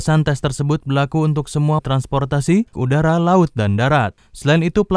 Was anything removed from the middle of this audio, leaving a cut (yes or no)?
yes